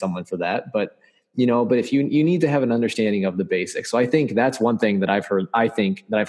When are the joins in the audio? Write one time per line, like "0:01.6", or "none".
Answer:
none